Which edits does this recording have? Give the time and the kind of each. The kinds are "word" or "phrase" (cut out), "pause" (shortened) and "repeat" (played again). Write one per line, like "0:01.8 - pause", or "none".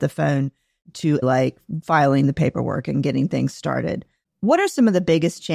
0:01.2 - word